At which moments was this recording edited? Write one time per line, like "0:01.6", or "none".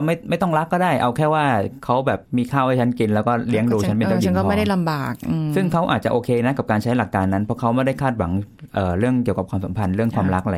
0:02.3